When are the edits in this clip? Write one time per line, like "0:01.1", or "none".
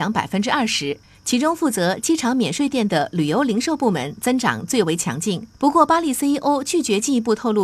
0:01.0
0:05.5